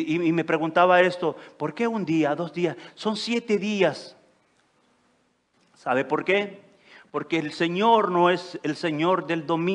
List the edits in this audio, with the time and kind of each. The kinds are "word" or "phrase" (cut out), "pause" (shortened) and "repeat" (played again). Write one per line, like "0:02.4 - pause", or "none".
none